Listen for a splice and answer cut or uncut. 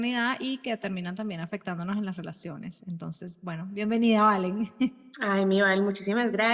cut